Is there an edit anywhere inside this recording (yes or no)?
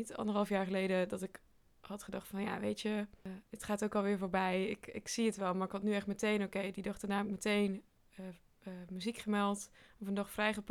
no